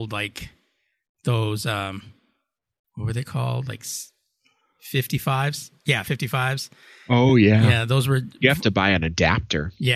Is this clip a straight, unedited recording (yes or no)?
yes